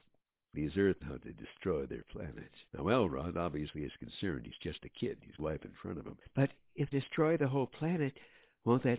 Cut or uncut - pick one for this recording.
cut